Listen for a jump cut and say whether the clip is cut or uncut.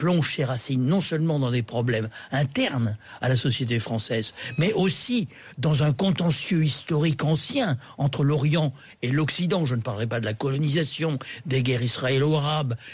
uncut